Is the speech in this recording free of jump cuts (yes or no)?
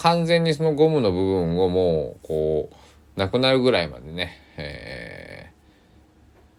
yes